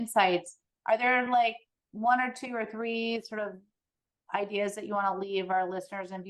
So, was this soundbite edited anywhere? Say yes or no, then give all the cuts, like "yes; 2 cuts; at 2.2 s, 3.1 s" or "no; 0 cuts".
no; 0 cuts